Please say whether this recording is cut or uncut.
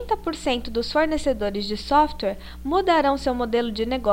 uncut